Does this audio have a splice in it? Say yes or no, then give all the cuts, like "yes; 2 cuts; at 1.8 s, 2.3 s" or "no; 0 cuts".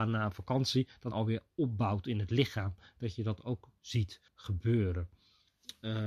yes; 2 cuts; at 1.1 s, 4.3 s